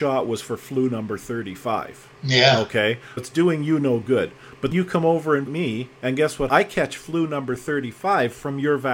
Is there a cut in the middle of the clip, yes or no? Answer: yes